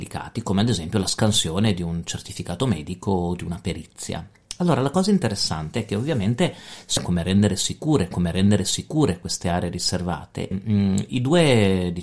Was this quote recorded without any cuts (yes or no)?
no